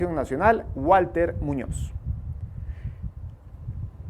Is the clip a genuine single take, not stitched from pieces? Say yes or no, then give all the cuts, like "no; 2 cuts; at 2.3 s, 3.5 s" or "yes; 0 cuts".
yes; 0 cuts